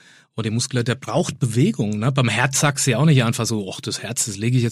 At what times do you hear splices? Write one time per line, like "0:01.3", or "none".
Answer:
none

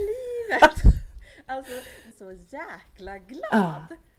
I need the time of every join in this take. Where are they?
0:02.1

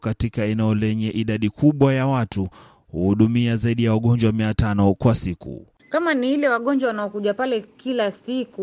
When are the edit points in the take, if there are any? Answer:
none

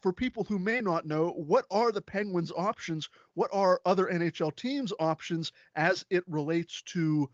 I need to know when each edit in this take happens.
none

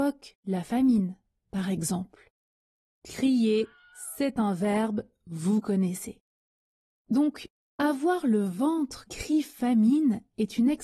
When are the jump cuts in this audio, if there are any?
0:09.1

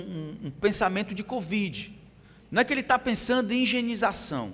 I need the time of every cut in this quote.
none

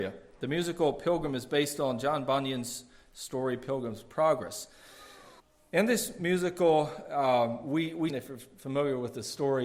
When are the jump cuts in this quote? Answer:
0:05.4
0:08.1

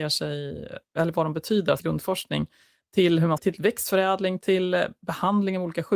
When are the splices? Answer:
0:01.8
0:03.4

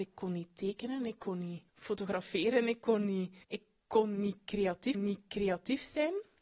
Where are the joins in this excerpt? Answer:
0:01.7
0:03.4
0:04.9

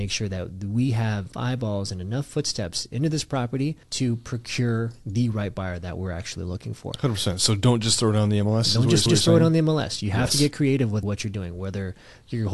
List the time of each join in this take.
0:01.3
0:03.8
0:09.1
0:11.0

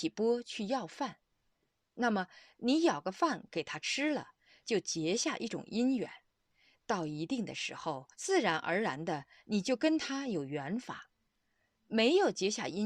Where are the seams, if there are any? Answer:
0:08.1

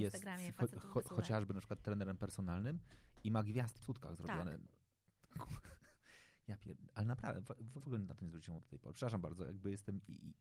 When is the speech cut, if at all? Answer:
0:01.1
0:03.8
0:07.8
0:08.6

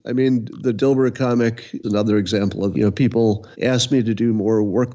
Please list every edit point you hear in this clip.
0:01.8
0:02.7
0:03.5

